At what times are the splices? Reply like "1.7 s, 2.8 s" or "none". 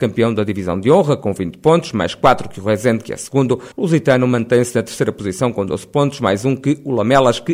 3.7 s